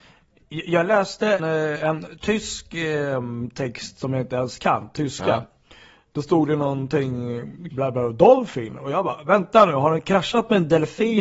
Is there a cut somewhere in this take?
yes; 2 cuts; at 1.4 s, 7.7 s

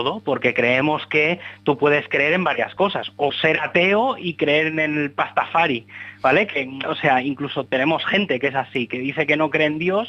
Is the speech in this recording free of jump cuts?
no; 2 cuts; at 3.3 s, 6.8 s

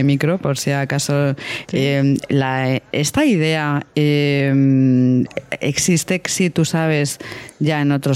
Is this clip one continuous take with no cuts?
yes; 0 cuts

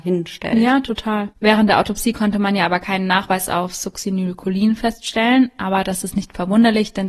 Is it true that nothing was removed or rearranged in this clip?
no; 1 cut; at 1.3 s

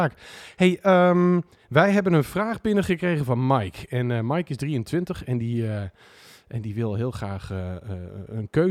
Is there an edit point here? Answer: no; 0 cuts

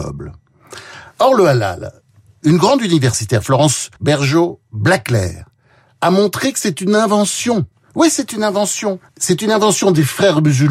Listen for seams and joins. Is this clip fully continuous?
no; 3 cuts; at 4.0 s, 7.7 s, 9.1 s

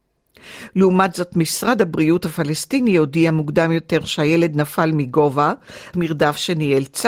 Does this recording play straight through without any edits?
no; 1 cut; at 5.9 s

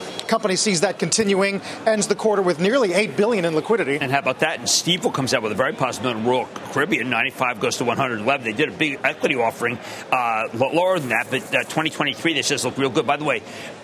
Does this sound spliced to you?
no; 0 cuts

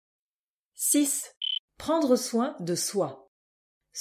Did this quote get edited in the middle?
yes; 1 cut; at 1.6 s

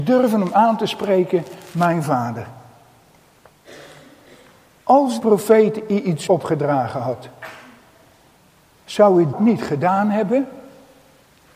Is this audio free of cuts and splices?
no; 3 cuts; at 5.2 s, 6.3 s, 9.3 s

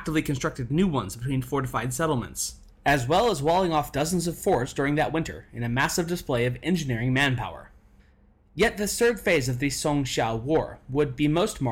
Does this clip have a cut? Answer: no; 0 cuts

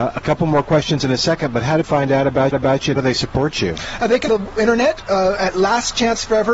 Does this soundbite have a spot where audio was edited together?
yes; 4 cuts; at 1.8 s, 2.5 s, 3.0 s, 4.3 s

